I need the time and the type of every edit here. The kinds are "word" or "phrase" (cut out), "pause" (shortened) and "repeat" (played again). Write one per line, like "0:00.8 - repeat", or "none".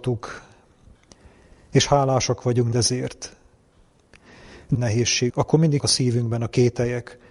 0:02.7 - word
0:04.7 - phrase
0:05.3 - word
0:05.8 - word